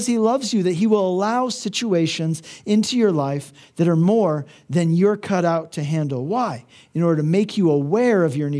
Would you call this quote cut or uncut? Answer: uncut